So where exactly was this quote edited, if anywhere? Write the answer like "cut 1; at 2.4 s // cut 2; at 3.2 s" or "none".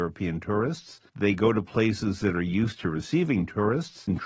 cut 1; at 1.1 s